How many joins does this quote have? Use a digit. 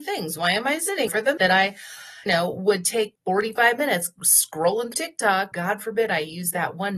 6